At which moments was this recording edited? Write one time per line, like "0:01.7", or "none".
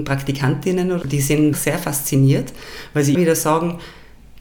0:01.0
0:01.5
0:03.1